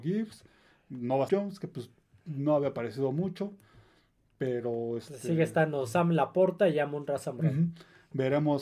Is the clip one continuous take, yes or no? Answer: no